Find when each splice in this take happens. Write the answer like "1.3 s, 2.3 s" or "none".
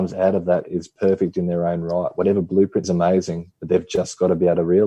2.8 s

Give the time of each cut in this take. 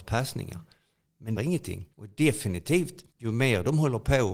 1.4 s, 1.9 s, 3.1 s

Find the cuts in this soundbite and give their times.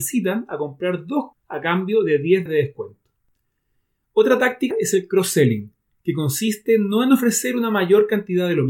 1.3 s, 2.5 s, 4.7 s

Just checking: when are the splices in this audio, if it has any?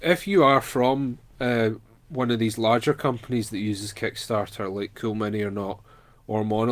none

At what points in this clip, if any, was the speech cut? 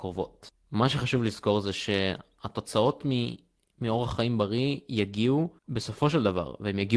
5.6 s

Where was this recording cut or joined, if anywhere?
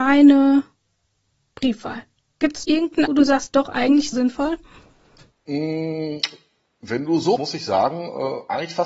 2.6 s, 3.1 s, 4.1 s, 7.4 s

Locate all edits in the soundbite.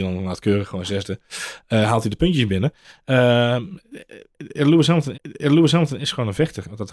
5.1 s

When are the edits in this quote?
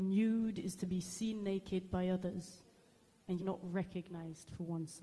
3.4 s

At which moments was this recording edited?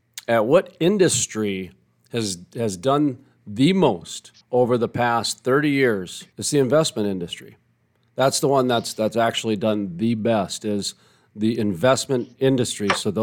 4.4 s, 6.3 s

